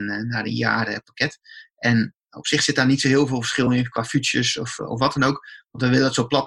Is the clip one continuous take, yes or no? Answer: yes